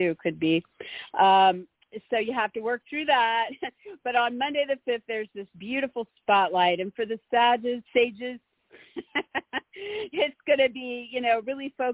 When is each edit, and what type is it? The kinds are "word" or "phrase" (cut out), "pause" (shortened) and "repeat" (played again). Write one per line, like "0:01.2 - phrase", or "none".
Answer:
0:07.9 - pause